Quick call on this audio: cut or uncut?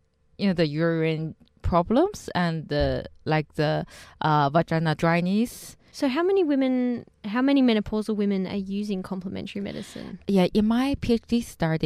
cut